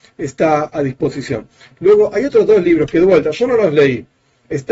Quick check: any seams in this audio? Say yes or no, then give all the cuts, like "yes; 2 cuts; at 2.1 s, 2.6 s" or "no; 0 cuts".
no; 0 cuts